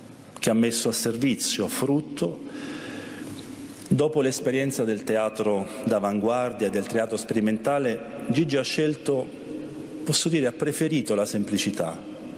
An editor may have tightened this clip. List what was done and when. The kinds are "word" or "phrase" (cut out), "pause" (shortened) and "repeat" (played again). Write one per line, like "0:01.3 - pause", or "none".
none